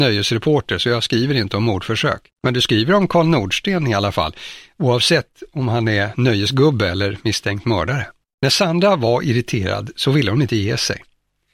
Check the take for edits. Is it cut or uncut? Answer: cut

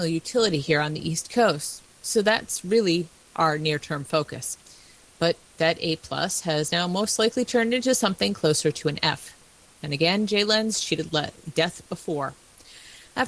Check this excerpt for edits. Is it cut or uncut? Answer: uncut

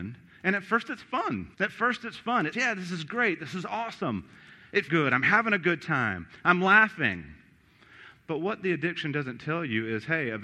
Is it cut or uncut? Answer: cut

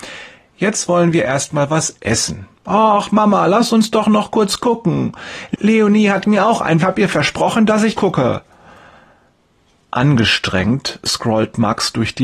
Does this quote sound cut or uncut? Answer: cut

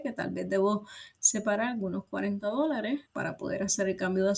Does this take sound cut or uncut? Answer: cut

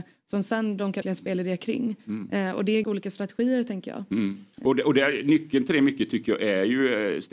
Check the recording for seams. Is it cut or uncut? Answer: cut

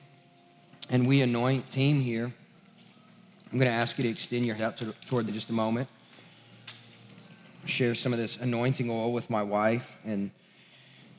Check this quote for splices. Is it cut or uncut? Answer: cut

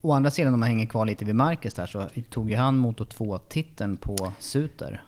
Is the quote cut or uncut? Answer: uncut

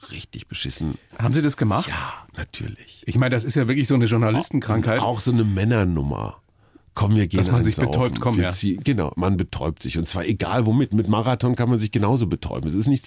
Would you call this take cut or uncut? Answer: uncut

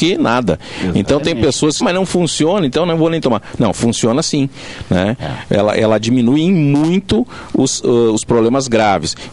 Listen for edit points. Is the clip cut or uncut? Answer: cut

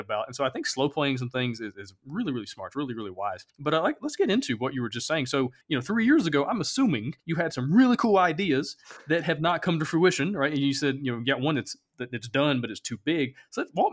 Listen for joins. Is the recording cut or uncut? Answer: cut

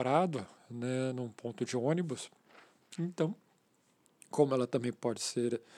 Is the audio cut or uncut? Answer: uncut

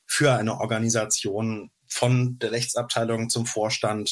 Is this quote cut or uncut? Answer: uncut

